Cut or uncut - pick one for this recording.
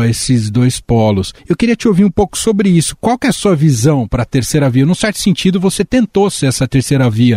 cut